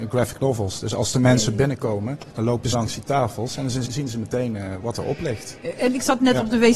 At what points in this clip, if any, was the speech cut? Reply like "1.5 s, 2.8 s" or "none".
2.3 s, 2.7 s, 3.9 s, 4.8 s